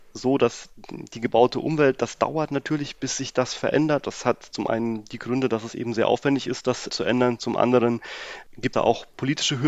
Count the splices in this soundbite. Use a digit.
2